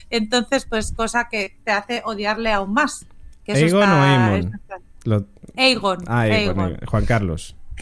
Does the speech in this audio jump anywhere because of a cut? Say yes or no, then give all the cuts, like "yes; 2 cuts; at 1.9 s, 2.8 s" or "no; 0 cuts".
no; 0 cuts